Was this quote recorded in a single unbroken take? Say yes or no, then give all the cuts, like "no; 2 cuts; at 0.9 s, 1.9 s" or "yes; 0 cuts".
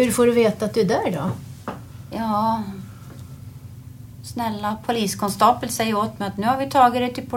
yes; 0 cuts